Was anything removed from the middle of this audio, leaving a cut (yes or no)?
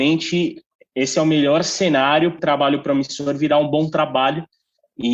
yes